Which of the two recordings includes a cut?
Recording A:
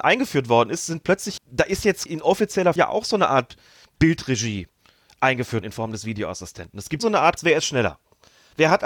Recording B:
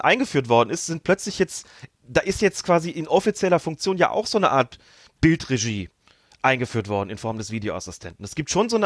A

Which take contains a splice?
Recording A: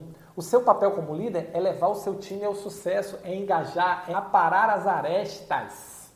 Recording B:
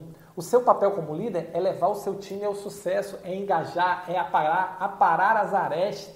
A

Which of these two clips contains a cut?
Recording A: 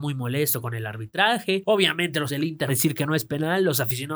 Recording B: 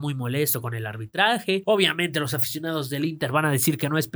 A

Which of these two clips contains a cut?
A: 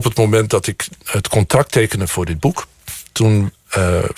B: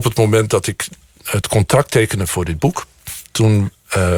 A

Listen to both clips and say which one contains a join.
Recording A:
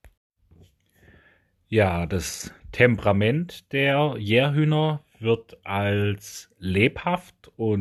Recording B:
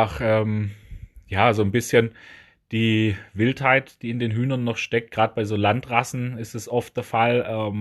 A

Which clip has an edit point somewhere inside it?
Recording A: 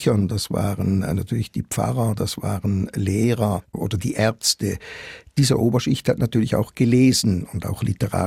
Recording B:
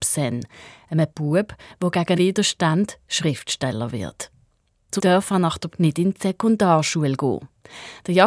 B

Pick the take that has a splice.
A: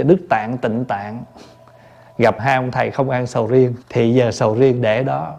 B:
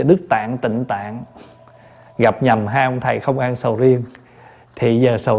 A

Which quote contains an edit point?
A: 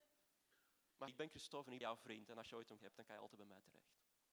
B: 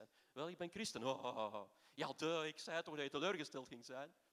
A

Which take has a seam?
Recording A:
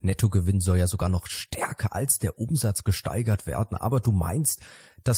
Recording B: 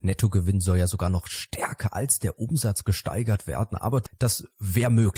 B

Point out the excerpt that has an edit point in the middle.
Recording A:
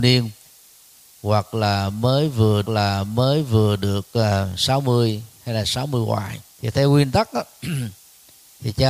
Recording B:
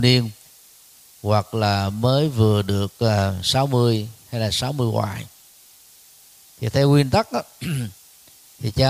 A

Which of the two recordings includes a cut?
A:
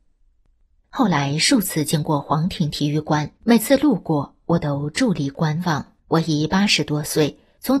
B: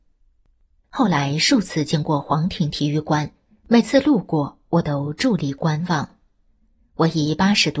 A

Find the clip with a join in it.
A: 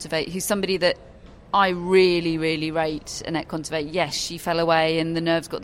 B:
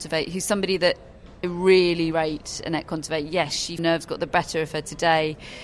B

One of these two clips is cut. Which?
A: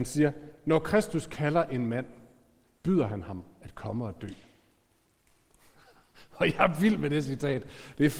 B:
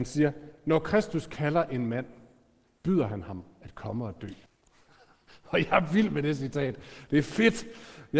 B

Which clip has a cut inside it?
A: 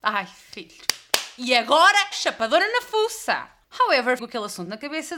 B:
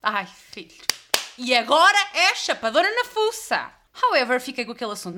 A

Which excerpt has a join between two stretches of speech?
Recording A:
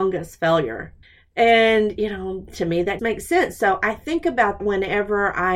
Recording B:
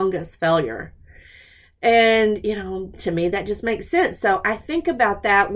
A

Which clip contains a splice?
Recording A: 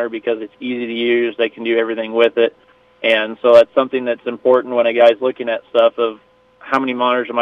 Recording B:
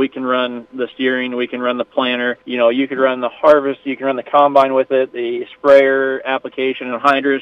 B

